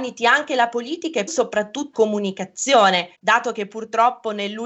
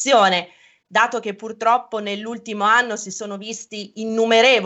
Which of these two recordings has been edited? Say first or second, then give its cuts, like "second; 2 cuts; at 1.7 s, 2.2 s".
first; 3 cuts; at 1.3 s, 1.9 s, 3.1 s